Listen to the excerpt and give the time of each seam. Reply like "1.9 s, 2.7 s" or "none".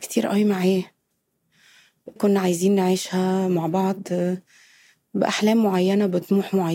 2.2 s

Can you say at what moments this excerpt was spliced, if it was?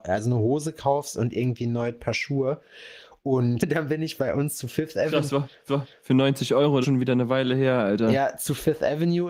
3.6 s, 5.7 s, 6.8 s

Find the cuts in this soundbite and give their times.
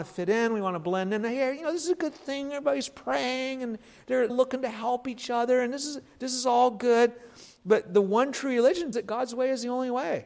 4.3 s, 8.9 s

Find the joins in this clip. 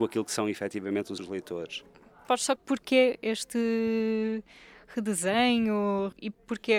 1.2 s, 2.6 s

